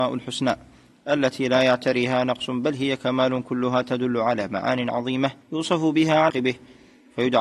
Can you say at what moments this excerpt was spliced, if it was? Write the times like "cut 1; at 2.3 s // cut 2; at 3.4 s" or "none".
cut 1; at 5.4 s // cut 2; at 6.3 s